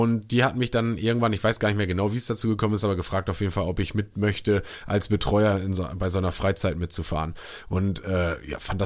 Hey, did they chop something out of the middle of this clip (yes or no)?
no